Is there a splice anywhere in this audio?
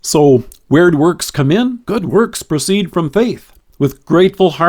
yes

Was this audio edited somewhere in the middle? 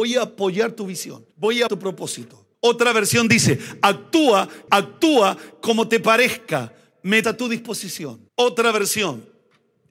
yes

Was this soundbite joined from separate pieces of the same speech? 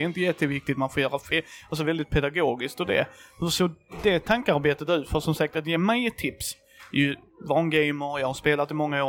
no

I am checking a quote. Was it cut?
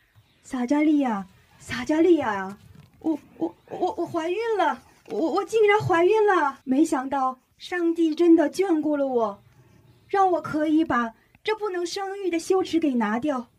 yes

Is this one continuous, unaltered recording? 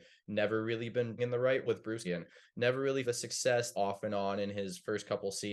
no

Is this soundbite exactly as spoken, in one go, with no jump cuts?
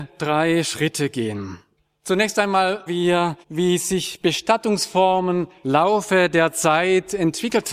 no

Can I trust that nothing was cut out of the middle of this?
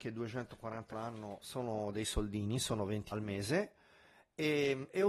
no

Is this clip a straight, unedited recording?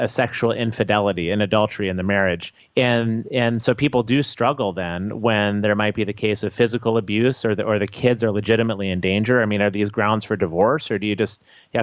no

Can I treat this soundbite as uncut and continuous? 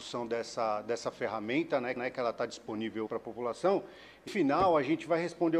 no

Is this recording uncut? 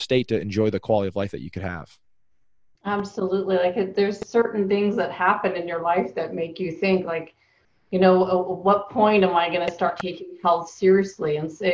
yes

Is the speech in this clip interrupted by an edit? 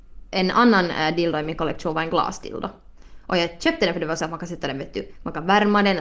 no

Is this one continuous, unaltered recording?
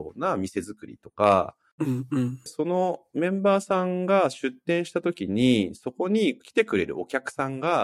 no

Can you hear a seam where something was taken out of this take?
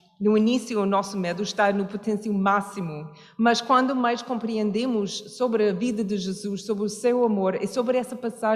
no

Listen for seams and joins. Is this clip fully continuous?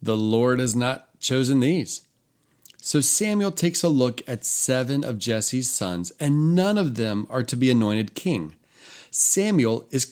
yes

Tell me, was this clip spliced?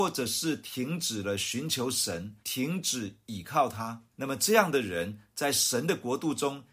yes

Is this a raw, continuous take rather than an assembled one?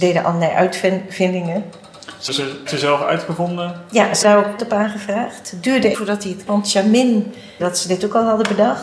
no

